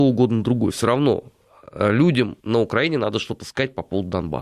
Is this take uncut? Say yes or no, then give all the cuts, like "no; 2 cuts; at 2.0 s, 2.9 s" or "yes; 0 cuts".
no; 1 cut; at 2.4 s